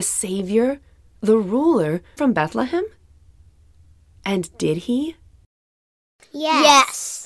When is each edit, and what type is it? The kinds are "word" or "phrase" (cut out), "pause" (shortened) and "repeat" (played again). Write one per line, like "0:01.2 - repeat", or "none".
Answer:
0:02.2 - phrase